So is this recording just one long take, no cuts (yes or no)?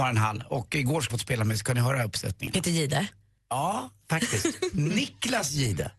no